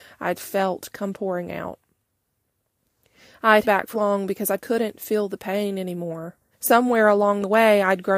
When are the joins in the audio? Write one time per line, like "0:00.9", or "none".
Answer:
0:03.6
0:03.9
0:04.6
0:06.5

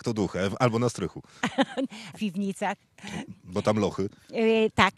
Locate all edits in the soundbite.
0:02.1

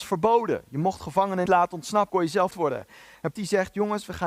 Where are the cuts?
0:01.5
0:02.1
0:02.5
0:03.4

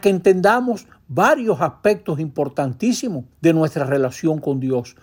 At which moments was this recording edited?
0:03.3

